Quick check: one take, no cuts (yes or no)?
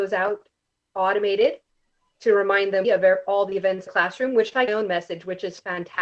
no